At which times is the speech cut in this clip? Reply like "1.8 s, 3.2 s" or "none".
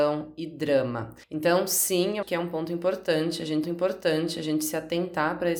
1.2 s, 2.2 s, 3.6 s